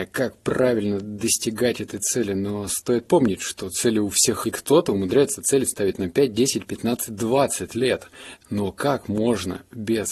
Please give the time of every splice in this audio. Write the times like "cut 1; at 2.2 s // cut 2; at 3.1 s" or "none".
cut 1; at 4.4 s